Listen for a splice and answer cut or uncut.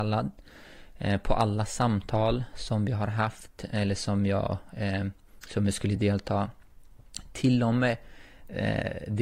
uncut